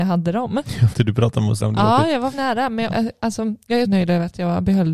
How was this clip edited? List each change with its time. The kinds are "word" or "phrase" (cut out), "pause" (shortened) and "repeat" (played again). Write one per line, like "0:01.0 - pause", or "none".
0:00.9 - word
0:01.6 - word
0:02.3 - word
0:02.9 - word
0:03.8 - word